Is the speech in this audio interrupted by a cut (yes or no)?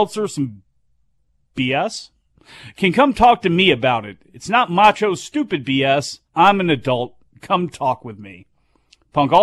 yes